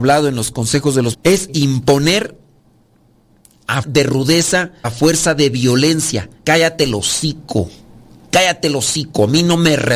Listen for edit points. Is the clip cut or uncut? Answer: cut